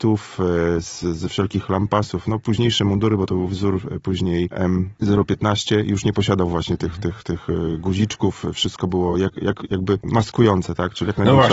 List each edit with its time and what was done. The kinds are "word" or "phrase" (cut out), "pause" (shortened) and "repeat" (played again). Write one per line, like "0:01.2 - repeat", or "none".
none